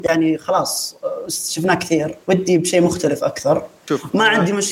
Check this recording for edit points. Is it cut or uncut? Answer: cut